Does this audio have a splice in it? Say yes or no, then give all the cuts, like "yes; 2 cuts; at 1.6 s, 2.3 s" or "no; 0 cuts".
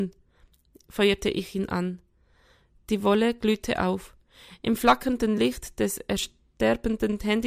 no; 0 cuts